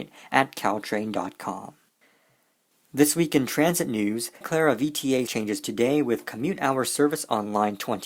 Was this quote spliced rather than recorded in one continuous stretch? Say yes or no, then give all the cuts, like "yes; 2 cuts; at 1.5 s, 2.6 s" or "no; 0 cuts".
yes; 3 cuts; at 4.4 s, 5.3 s, 5.6 s